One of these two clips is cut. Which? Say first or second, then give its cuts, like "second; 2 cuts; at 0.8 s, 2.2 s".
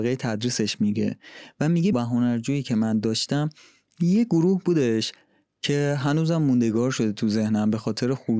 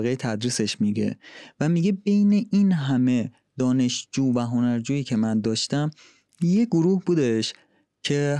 first; 1 cut; at 1.9 s